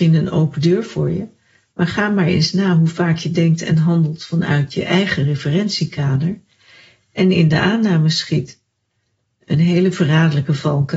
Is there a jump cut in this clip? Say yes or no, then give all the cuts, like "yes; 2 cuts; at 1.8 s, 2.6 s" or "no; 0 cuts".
no; 0 cuts